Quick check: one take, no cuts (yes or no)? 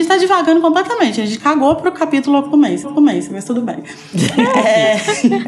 no